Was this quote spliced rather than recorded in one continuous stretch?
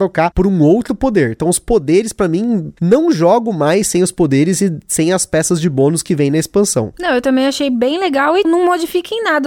yes; 2 cuts; at 2.8 s, 8.4 s

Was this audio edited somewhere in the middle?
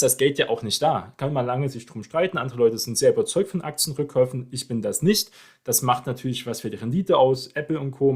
no; 0 cuts

